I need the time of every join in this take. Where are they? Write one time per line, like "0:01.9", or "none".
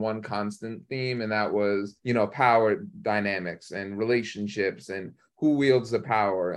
0:02.0